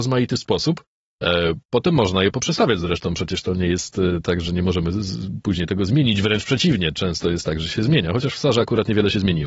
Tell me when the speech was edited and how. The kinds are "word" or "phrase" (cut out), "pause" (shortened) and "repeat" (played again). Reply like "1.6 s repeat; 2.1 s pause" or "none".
none